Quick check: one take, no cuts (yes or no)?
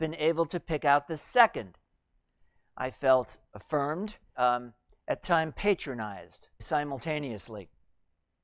no